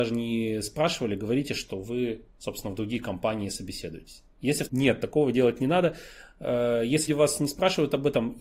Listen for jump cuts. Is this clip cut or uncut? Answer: cut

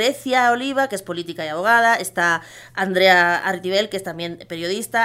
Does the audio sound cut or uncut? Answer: uncut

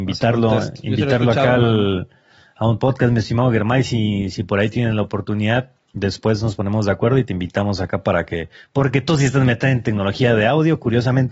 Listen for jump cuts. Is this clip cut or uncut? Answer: uncut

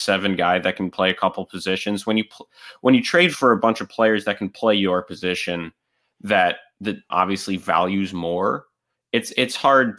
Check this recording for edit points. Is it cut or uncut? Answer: cut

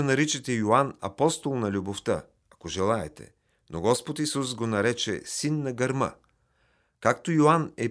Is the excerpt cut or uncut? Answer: uncut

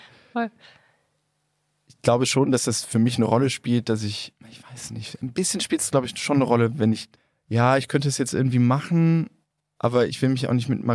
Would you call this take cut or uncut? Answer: cut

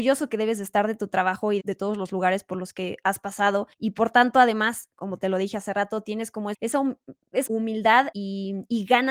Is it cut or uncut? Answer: cut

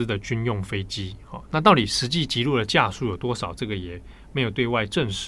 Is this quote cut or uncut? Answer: uncut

